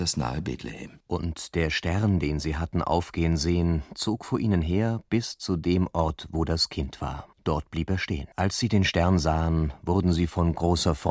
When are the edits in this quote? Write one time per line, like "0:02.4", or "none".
0:01.0
0:07.3
0:08.3